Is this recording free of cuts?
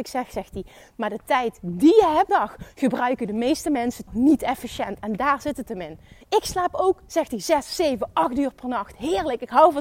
no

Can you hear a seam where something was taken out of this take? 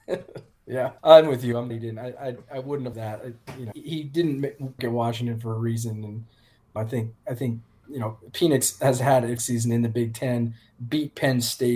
yes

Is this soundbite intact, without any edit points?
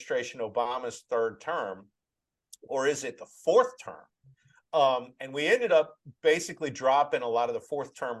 yes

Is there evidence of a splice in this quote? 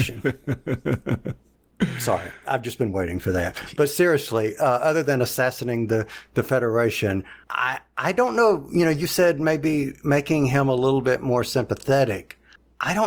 yes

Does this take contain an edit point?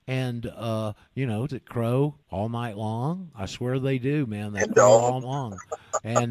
yes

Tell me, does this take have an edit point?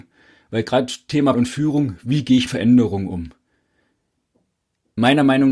yes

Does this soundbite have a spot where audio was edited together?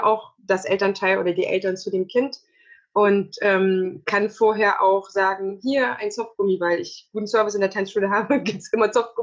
no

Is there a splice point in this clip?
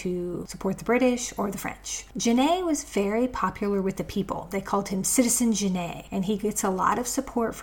no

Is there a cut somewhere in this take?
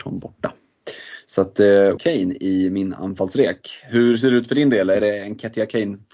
yes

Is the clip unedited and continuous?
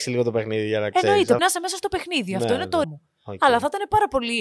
no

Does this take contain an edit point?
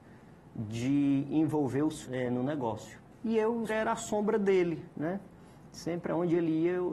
yes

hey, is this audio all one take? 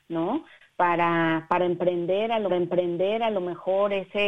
no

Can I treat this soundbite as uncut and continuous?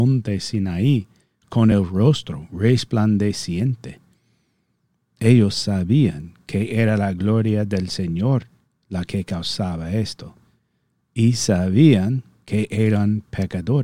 yes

